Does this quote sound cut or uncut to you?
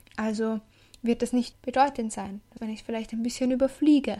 cut